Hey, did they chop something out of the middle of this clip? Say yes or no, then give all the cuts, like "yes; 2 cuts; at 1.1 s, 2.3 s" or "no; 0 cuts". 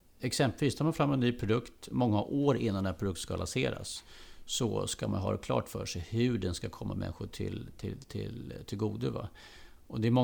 no; 0 cuts